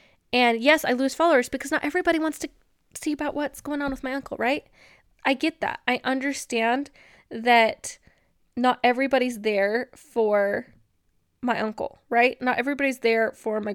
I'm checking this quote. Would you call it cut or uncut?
uncut